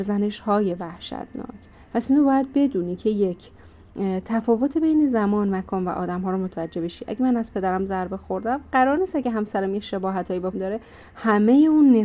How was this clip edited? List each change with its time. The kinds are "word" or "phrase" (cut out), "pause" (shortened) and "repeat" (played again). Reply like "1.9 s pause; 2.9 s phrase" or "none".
1.7 s pause; 10.5 s word

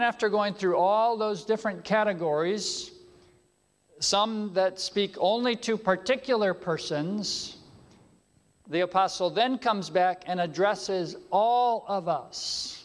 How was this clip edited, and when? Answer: none

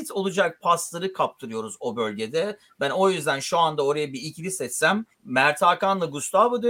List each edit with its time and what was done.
5.1 s pause

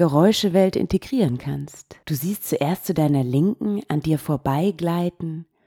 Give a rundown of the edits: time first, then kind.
2.0 s pause

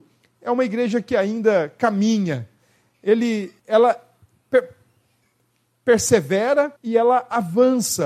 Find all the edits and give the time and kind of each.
3.6 s pause; 6.8 s pause

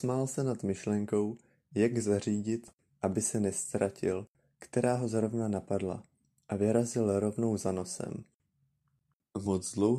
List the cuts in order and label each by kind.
none

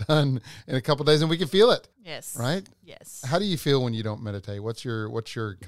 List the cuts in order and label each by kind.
1.9 s pause

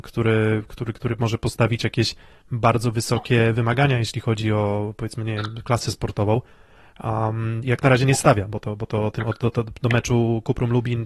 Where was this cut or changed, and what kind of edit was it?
none

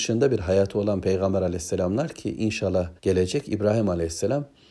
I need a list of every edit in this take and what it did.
3.0 s pause

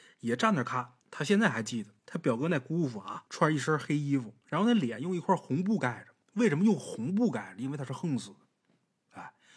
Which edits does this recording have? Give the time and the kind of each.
1.0 s pause; 2.0 s pause; 3.3 s pause; 4.4 s pause; 6.2 s pause

